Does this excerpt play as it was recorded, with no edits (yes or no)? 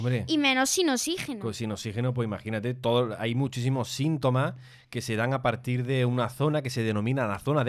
yes